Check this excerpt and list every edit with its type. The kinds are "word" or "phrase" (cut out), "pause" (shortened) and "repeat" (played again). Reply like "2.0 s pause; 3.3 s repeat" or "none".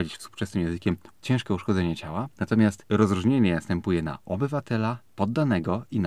none